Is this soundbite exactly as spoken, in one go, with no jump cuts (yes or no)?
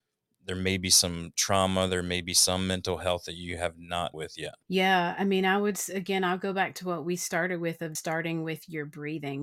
no